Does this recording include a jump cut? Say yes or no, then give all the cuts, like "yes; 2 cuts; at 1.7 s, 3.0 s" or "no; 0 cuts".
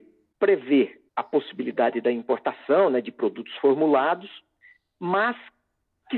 yes; 1 cut; at 1.1 s